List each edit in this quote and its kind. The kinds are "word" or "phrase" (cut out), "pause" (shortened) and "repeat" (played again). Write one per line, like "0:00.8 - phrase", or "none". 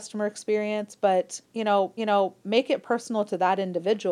0:01.4 - pause
0:02.0 - repeat